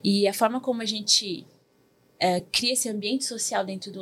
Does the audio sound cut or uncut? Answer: uncut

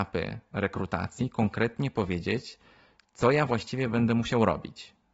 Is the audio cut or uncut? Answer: uncut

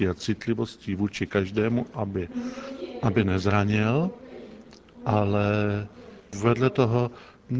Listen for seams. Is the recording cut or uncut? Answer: uncut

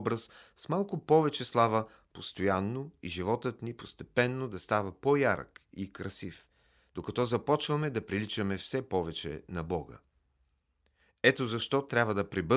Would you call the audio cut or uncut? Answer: uncut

